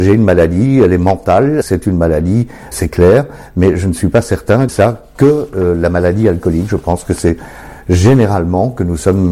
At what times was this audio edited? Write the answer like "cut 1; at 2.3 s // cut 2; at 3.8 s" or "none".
cut 1; at 1.6 s // cut 2; at 2.7 s // cut 3; at 4.7 s